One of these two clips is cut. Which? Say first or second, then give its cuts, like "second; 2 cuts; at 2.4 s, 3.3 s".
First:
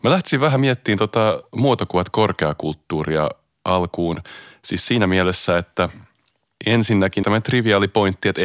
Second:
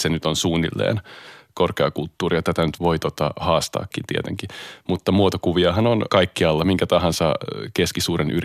first; 1 cut; at 7.2 s